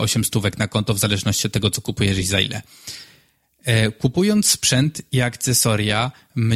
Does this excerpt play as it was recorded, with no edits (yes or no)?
yes